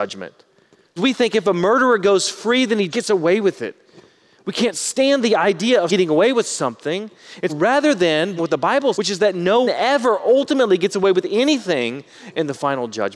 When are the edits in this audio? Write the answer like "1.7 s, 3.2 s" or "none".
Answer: 1.0 s, 2.9 s, 5.9 s, 7.5 s, 8.4 s, 8.9 s, 9.6 s